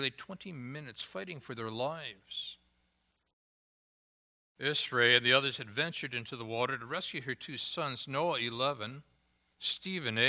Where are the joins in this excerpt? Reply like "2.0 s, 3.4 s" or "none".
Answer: none